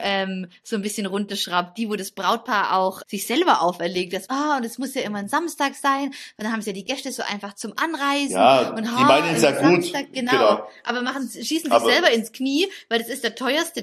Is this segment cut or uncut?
cut